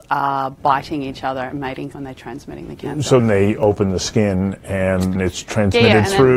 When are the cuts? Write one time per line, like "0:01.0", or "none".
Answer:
0:01.9
0:03.2
0:05.2

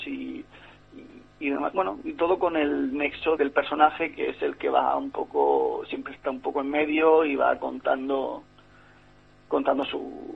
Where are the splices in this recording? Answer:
0:03.4

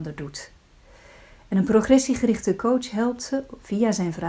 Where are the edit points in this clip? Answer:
none

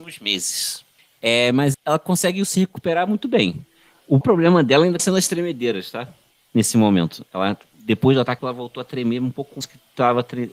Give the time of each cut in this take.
0:01.7
0:04.2
0:05.0
0:07.7
0:08.4
0:09.6

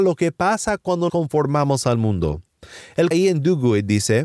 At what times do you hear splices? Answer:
0:01.1
0:03.1

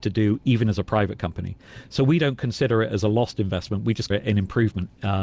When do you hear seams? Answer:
0:04.1

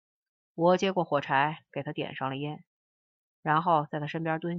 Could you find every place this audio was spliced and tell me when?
none

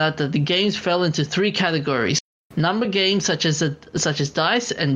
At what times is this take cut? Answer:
none

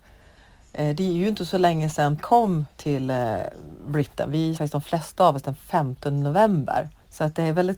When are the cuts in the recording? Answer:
0:02.2
0:02.7
0:04.6

